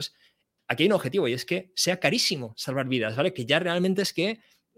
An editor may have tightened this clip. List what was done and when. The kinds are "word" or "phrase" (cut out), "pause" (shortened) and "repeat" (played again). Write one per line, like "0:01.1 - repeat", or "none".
none